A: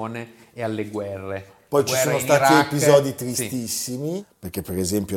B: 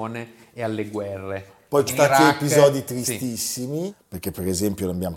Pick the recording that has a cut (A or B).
B